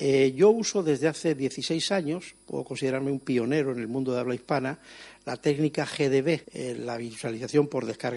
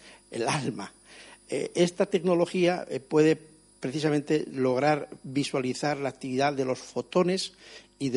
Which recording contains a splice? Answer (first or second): first